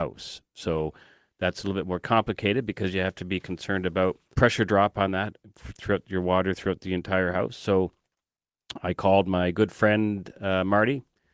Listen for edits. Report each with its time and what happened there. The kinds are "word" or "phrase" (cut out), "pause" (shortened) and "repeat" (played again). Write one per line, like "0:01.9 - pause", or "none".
0:04.3 - word